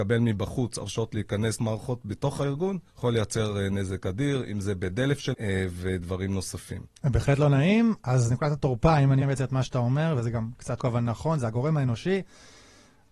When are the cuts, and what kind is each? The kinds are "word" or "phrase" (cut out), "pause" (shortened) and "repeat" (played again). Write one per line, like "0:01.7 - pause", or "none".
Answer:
0:01.6 - word
0:02.9 - pause
0:05.3 - word
0:07.0 - pause
0:09.2 - word
0:10.8 - word